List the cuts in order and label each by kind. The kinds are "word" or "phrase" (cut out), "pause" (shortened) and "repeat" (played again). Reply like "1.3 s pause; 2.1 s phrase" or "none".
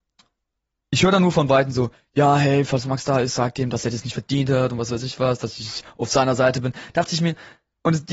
none